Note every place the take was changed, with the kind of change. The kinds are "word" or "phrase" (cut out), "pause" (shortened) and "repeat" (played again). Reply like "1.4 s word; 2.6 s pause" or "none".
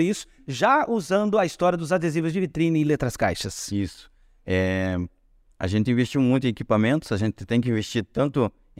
none